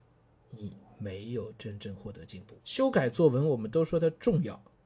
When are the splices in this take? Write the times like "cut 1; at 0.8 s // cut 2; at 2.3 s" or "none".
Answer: cut 1; at 2.6 s